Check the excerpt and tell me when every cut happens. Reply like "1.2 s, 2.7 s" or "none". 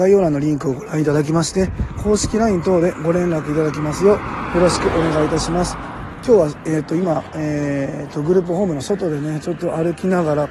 none